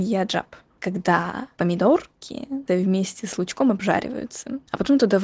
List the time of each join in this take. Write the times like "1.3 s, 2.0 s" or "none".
2.6 s